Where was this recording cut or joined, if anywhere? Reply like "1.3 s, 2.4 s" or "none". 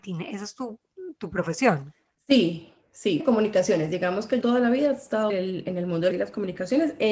3.2 s, 4.4 s, 5.3 s, 6.1 s